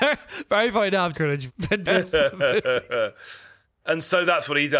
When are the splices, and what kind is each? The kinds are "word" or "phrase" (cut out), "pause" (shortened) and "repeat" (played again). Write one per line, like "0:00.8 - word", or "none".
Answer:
0:01.1 - word
0:01.5 - word
0:01.8 - phrase